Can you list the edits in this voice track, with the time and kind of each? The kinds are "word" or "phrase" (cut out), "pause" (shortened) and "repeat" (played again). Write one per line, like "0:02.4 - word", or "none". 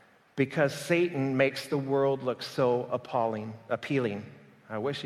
none